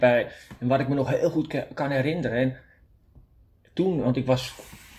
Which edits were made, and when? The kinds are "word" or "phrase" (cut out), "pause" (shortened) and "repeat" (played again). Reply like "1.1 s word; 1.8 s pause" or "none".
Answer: none